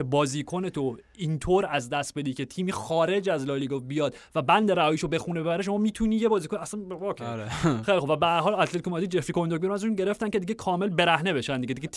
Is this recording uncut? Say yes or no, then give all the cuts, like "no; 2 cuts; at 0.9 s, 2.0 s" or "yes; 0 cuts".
yes; 0 cuts